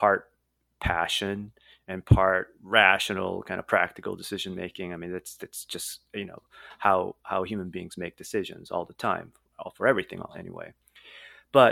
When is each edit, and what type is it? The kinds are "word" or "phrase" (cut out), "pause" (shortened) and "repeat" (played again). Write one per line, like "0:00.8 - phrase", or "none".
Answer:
none